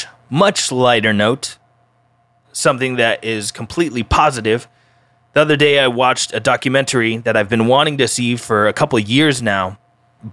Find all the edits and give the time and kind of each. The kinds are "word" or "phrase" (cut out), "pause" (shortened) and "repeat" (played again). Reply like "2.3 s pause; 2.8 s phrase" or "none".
none